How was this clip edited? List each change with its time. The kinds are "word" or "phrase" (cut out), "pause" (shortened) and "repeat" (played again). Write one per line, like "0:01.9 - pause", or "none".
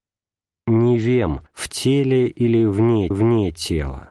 0:01.5 - pause
0:03.1 - repeat